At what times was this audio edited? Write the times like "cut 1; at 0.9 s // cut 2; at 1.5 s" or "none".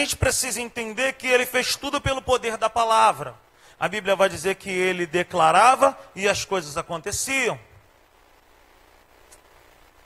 none